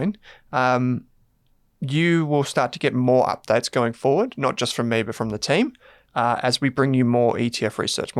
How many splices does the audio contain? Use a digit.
0